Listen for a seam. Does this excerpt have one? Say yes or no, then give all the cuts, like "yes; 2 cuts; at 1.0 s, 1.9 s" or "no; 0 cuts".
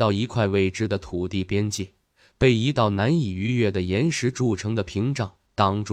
no; 0 cuts